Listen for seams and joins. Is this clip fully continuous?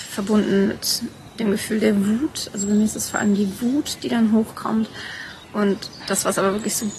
no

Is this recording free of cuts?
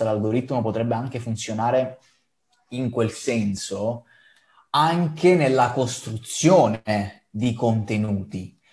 yes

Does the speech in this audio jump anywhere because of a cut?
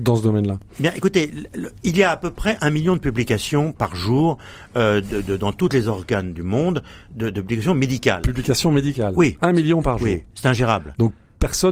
no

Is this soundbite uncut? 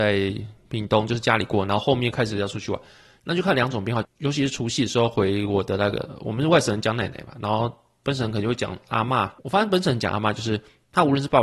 no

